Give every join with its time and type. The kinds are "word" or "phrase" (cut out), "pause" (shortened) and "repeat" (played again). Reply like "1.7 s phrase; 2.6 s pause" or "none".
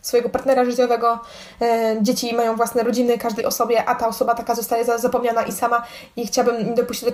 3.4 s word